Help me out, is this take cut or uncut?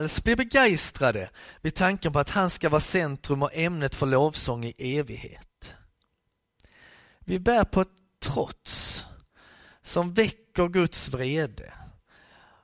uncut